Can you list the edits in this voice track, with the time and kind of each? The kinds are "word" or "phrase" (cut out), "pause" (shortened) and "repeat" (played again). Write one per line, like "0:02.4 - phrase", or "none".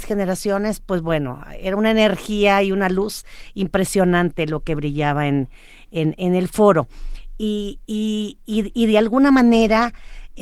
none